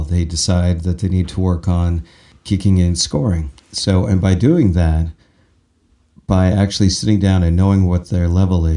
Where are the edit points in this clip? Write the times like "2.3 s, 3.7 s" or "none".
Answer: none